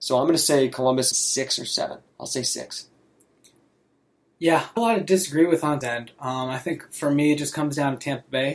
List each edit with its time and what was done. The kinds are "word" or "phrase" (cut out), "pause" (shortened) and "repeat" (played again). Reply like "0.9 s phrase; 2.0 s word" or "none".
1.1 s phrase; 2.1 s pause; 4.8 s phrase; 5.8 s word